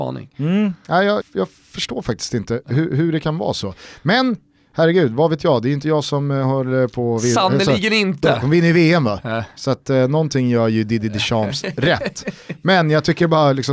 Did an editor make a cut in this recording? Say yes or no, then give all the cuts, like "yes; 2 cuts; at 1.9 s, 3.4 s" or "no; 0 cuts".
yes; 1 cut; at 1.2 s